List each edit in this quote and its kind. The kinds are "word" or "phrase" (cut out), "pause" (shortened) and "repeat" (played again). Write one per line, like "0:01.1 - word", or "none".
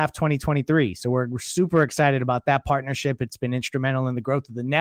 none